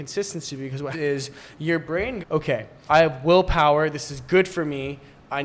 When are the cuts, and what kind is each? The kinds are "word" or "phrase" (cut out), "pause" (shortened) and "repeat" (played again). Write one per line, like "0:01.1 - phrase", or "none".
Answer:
0:00.9 - word
0:02.2 - word
0:02.9 - word